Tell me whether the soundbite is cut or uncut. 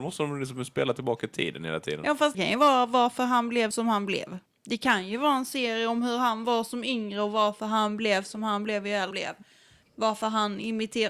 cut